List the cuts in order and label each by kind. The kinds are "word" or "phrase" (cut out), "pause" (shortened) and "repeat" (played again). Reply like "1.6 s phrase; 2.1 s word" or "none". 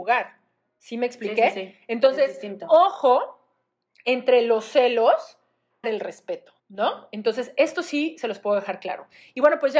5.8 s phrase; 6.6 s pause